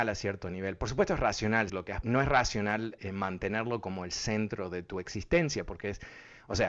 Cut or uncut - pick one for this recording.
cut